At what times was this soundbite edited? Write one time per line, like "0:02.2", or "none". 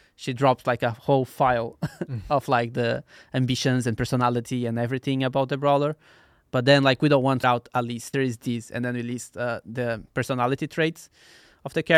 0:07.4
0:08.1